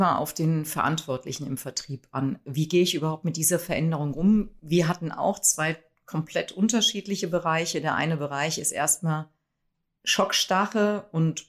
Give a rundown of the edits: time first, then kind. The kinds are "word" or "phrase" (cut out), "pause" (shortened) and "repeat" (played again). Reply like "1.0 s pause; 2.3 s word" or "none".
none